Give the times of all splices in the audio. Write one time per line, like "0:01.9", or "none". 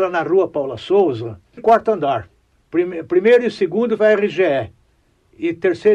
0:01.6
0:04.0